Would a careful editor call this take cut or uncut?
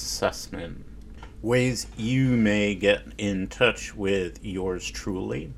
uncut